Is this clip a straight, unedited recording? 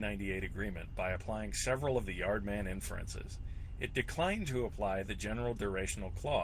yes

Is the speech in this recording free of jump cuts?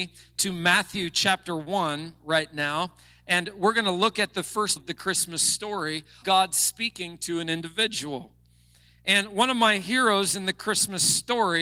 no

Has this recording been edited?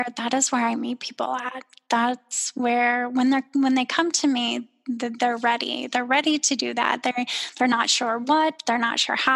no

